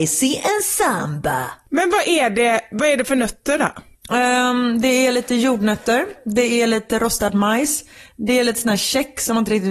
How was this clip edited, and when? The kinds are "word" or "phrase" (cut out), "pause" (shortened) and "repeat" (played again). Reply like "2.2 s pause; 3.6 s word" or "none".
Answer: none